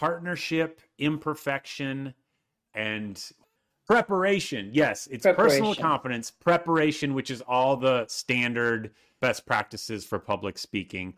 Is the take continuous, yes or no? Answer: yes